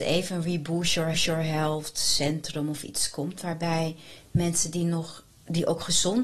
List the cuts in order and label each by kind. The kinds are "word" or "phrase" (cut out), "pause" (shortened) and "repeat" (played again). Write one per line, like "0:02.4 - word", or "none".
0:01.1 - repeat